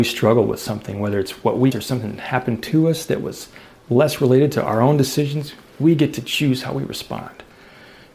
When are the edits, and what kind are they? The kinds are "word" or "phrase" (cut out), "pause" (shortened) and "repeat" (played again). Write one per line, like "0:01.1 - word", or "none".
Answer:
0:01.7 - word